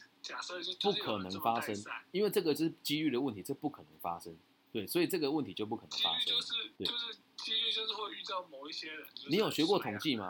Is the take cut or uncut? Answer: cut